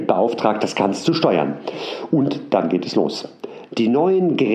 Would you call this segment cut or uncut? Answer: uncut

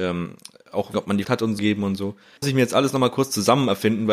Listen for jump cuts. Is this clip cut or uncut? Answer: cut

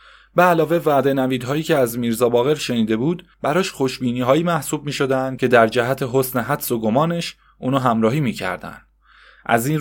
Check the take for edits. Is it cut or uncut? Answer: cut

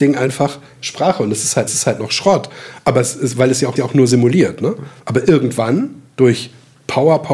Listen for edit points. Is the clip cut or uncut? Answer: cut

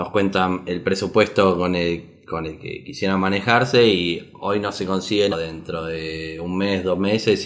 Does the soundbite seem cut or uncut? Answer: cut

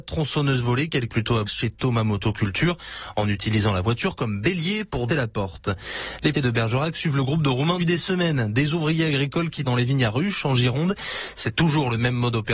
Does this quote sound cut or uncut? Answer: cut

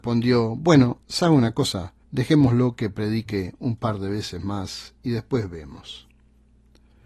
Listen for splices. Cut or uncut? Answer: cut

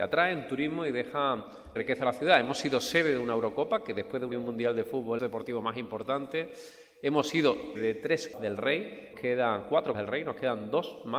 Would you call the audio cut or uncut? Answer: cut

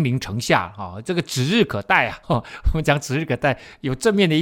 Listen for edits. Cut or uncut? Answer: cut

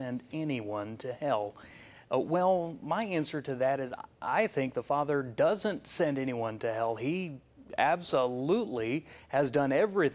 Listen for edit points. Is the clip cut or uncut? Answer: uncut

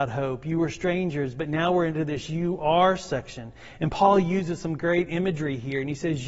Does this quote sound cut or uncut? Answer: uncut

